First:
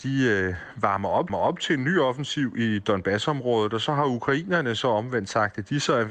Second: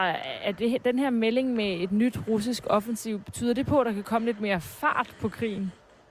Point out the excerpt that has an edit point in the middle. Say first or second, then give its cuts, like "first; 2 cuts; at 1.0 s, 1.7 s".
first; 1 cut; at 1.3 s